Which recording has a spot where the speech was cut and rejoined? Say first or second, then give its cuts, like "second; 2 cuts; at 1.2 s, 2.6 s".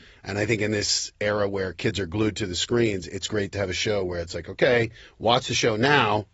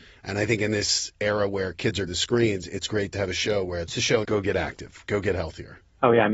second; 3 cuts; at 2.1 s, 3.9 s, 4.2 s